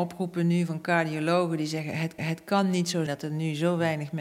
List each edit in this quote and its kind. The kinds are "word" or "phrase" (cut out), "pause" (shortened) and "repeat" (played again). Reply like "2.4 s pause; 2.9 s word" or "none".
2.2 s repeat; 3.1 s word